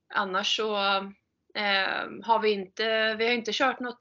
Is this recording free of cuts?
yes; 0 cuts

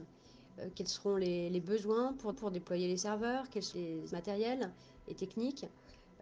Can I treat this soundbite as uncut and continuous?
no; 3 cuts; at 2.3 s, 3.7 s, 4.1 s

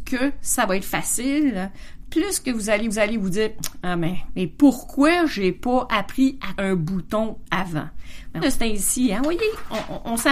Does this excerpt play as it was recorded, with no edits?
no; 4 cuts; at 2.9 s, 4.3 s, 6.6 s, 8.4 s

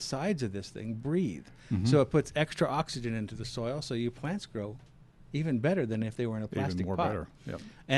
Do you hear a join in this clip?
no; 0 cuts

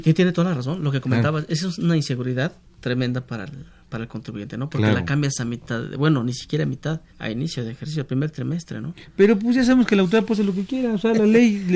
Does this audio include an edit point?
yes; 2 cuts; at 2.7 s, 7.1 s

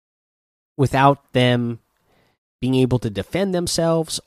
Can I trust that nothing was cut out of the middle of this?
yes; 0 cuts

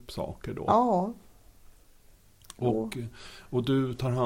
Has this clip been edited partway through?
no; 0 cuts

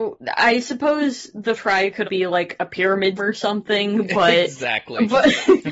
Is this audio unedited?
no; 3 cuts; at 1.6 s, 2.0 s, 3.2 s

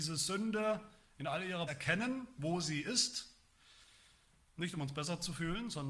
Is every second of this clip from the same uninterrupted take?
no; 1 cut; at 1.7 s

